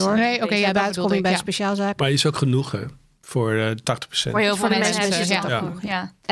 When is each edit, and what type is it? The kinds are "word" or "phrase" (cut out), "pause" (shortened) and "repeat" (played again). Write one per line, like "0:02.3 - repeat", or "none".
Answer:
none